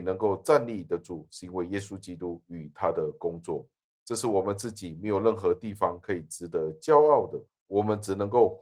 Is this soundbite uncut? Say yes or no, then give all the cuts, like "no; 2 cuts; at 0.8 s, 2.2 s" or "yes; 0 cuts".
yes; 0 cuts